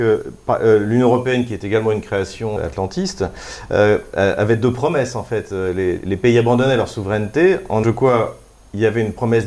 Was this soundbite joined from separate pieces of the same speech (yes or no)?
yes